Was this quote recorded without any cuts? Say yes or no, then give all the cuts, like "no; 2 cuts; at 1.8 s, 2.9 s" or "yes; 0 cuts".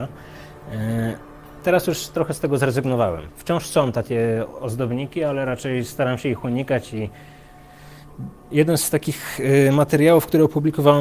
no; 1 cut; at 8.4 s